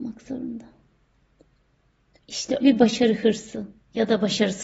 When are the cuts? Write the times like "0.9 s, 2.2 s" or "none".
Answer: 2.6 s